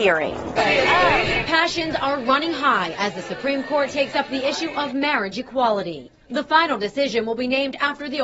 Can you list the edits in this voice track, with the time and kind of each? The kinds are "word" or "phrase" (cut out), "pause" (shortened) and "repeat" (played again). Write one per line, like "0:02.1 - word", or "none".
none